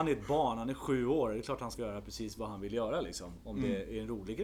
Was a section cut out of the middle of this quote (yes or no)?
yes